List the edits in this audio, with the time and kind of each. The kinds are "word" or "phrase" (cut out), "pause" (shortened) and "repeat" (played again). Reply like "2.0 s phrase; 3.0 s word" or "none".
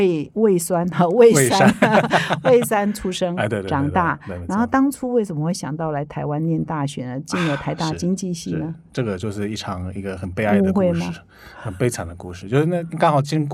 none